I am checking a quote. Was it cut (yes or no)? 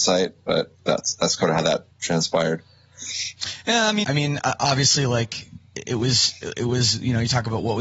yes